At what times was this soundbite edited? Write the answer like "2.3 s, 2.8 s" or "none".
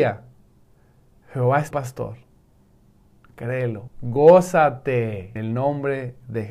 1.7 s, 3.9 s, 5.4 s